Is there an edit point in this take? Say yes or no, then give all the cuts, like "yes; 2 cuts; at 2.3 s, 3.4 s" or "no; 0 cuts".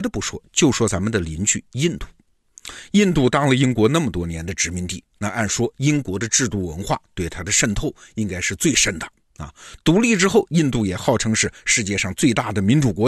no; 0 cuts